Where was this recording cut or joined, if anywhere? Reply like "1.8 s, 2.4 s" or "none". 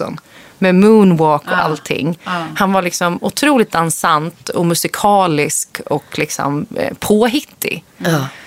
none